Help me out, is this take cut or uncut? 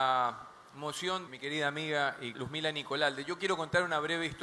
cut